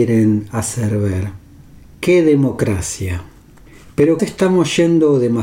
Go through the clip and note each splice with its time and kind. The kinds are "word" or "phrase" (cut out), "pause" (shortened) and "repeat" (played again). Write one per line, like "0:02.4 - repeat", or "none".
0:04.2 - word